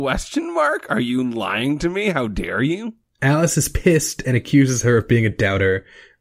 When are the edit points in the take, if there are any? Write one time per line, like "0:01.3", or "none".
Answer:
none